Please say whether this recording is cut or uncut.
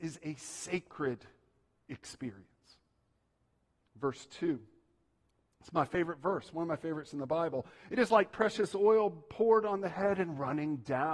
uncut